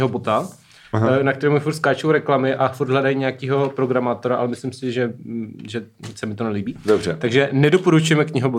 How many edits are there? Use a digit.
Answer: 0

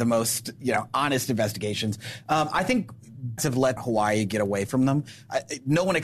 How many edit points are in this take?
2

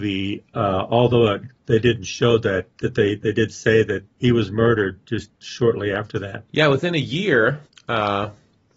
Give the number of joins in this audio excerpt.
5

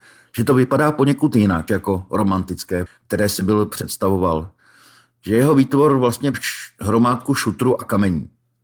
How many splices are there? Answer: 3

